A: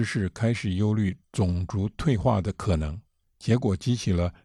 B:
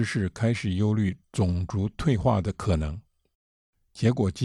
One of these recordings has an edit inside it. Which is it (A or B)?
A